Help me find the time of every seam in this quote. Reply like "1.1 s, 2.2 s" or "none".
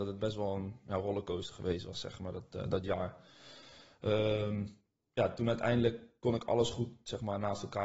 none